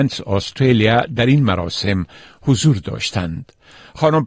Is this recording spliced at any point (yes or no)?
no